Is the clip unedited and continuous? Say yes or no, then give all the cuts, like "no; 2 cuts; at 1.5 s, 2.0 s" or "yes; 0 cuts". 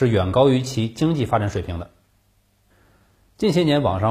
yes; 0 cuts